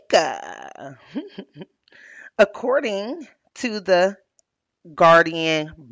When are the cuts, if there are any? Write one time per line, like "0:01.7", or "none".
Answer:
none